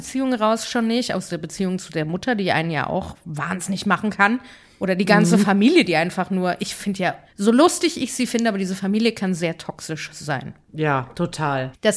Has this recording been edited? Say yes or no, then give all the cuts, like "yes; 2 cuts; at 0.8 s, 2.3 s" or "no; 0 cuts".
no; 0 cuts